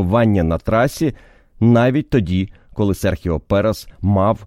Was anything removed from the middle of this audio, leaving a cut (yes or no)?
no